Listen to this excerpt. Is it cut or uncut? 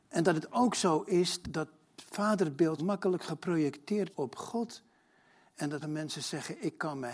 cut